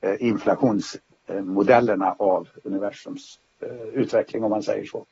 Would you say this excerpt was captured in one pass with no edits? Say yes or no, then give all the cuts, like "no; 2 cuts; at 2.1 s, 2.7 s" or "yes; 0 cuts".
yes; 0 cuts